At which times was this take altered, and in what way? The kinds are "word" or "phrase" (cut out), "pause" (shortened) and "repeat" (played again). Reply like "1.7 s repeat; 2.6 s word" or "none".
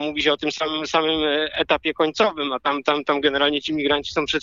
none